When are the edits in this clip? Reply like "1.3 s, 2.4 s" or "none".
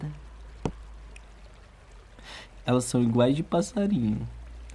none